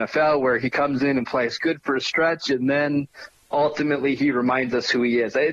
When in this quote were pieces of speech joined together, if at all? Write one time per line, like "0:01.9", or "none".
none